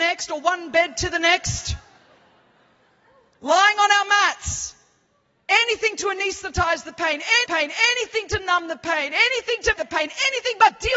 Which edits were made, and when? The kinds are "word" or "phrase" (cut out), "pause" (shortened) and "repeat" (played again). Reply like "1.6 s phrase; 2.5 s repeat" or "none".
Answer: 7.4 s repeat; 9.7 s word